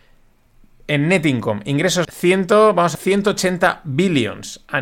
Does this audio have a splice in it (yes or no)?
yes